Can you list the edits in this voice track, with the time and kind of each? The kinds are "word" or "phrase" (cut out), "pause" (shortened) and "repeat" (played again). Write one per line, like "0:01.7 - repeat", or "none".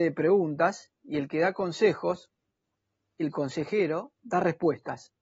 none